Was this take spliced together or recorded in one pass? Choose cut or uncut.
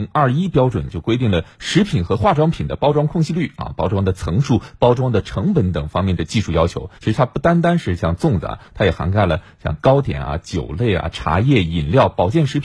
cut